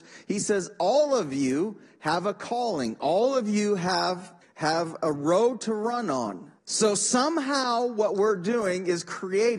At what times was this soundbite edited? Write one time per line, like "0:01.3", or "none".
0:04.4
0:06.6